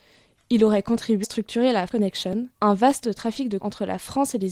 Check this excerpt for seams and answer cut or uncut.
cut